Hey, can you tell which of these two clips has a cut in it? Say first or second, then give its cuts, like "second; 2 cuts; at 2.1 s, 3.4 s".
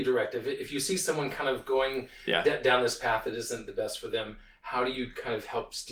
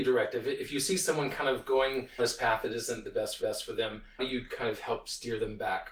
second; 3 cuts; at 2.2 s, 3.4 s, 4.2 s